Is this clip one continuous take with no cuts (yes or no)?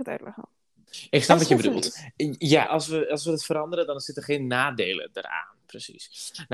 no